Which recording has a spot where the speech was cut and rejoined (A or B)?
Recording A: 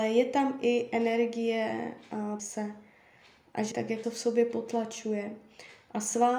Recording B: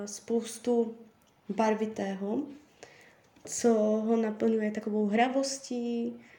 A